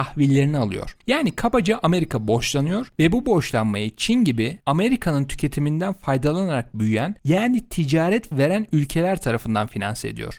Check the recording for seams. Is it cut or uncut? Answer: cut